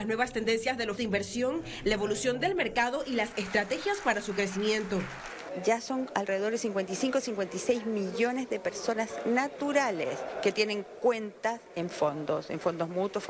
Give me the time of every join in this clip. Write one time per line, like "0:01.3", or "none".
0:01.0